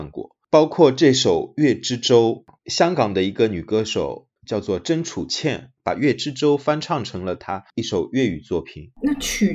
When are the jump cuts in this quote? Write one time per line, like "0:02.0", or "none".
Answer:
0:04.4